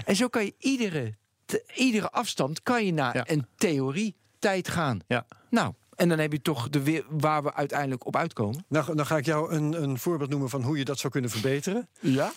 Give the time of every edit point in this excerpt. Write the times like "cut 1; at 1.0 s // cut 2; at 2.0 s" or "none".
none